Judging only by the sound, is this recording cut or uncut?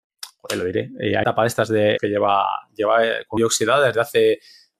cut